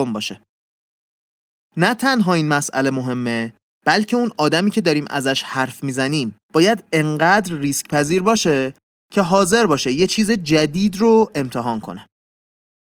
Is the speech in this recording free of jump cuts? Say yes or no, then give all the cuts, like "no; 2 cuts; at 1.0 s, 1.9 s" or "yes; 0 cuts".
no; 1 cut; at 6.4 s